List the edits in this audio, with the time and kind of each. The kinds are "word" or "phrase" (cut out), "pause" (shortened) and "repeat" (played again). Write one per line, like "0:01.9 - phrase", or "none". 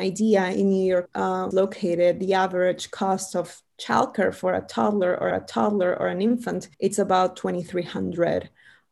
0:01.1 - word
0:01.5 - phrase
0:05.3 - repeat
0:06.7 - pause